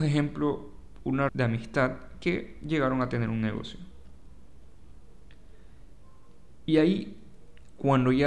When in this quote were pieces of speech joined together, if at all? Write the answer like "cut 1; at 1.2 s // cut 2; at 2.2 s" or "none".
cut 1; at 1.3 s